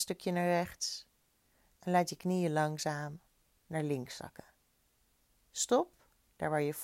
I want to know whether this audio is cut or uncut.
uncut